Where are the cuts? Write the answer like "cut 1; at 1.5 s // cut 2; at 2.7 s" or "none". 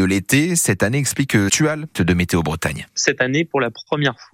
cut 1; at 1.5 s // cut 2; at 2.0 s // cut 3; at 2.9 s